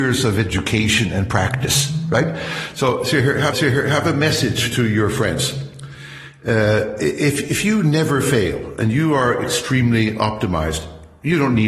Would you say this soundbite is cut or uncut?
cut